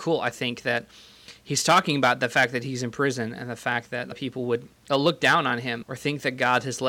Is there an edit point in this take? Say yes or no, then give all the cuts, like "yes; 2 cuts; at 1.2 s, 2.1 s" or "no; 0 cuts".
yes; 3 cuts; at 4.1 s, 4.8 s, 5.8 s